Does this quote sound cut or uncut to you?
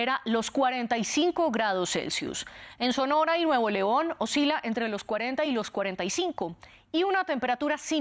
uncut